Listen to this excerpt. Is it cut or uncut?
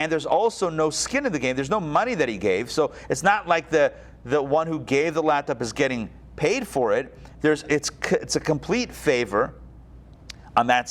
uncut